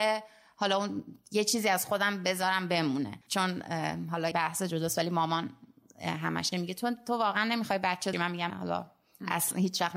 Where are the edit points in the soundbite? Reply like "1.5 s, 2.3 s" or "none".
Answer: 3.2 s, 4.3 s, 6.5 s, 8.1 s, 8.5 s